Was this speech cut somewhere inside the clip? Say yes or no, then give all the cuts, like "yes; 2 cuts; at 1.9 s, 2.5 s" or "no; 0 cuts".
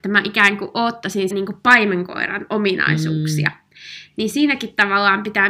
yes; 1 cut; at 1.3 s